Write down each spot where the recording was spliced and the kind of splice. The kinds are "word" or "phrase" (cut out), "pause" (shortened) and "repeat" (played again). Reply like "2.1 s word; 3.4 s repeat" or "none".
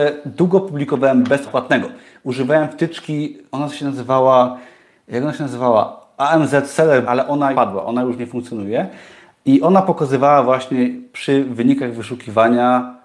1.5 s word; 7.0 s word; 7.5 s word